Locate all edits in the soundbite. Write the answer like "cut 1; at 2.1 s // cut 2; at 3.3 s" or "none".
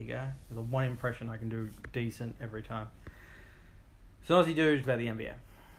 cut 1; at 4.8 s